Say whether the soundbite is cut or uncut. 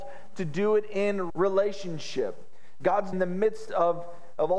cut